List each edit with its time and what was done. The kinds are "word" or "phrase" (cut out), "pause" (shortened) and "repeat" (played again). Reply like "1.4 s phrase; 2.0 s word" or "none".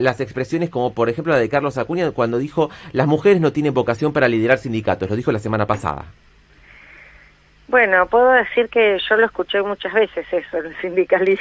none